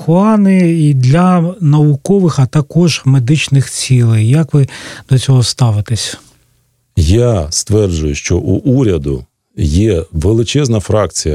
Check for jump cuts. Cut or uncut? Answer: uncut